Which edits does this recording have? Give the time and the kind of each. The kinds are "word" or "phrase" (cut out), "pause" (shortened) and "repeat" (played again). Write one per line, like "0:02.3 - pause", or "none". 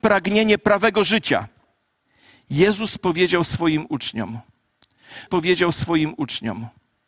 0:02.1 - pause
0:05.3 - repeat